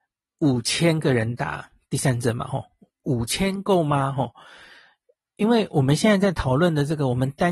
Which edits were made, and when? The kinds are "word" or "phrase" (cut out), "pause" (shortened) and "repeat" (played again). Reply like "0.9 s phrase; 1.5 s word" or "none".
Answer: none